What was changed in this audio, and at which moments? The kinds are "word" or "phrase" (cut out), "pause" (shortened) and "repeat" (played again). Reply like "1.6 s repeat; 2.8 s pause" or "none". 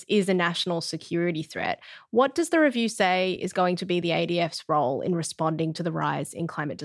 none